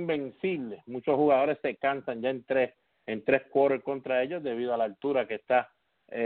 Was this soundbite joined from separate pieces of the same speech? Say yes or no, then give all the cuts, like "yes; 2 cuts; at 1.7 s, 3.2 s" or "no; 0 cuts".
no; 0 cuts